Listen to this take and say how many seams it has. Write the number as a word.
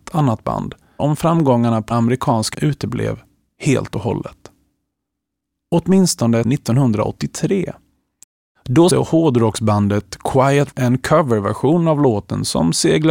six